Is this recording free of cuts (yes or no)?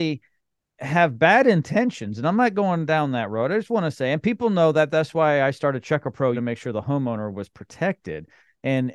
no